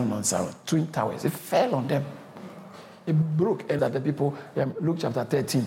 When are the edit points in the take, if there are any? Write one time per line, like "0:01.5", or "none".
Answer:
0:03.8